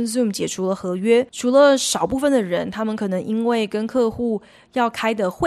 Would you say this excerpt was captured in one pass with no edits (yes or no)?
no